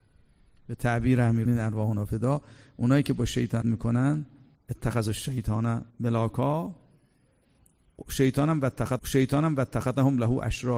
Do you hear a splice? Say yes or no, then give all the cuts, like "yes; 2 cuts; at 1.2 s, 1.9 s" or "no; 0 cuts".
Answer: yes; 5 cuts; at 1.5 s, 3.6 s, 4.5 s, 5.9 s, 9.0 s